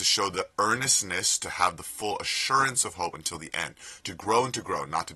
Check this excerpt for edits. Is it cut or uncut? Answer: uncut